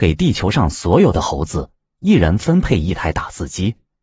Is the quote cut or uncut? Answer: uncut